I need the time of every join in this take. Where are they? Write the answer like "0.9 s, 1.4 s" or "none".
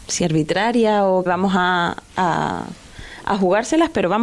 1.3 s